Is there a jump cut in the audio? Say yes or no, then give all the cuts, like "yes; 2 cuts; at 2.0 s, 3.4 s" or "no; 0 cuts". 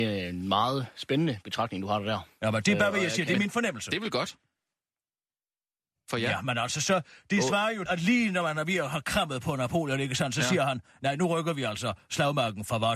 yes; 1 cut; at 7.9 s